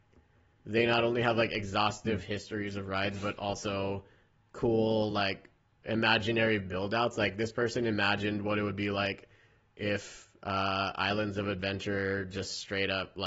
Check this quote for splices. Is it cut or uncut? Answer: uncut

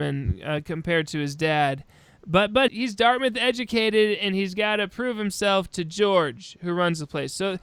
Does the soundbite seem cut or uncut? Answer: cut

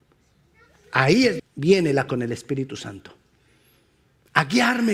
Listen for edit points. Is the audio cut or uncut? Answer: cut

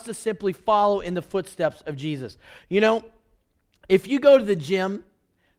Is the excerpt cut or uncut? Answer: uncut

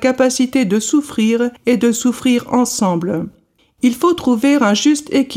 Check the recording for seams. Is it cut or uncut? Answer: cut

